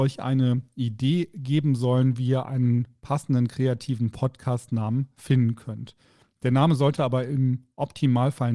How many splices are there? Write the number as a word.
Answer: zero